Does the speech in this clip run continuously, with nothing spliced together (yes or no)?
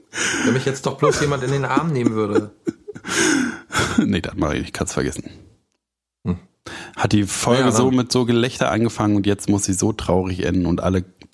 yes